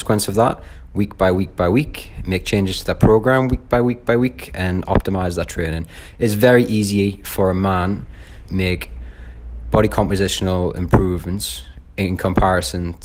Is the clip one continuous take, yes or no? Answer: no